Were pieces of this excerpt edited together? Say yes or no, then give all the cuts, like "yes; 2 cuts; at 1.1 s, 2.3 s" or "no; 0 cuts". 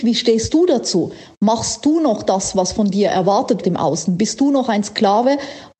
yes; 1 cut; at 3.6 s